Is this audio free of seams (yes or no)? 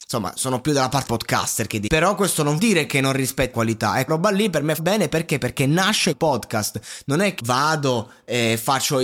no